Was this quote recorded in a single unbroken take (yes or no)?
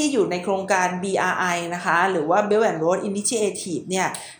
yes